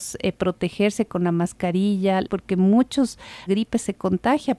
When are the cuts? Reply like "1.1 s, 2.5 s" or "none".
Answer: 2.2 s, 3.5 s